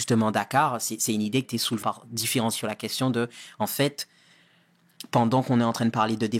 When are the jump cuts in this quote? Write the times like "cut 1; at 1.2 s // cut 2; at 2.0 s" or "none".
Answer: cut 1; at 1.4 s // cut 2; at 1.8 s // cut 3; at 2.5 s